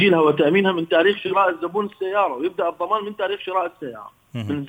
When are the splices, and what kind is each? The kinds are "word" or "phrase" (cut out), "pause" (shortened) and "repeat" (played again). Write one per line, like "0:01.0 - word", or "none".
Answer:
none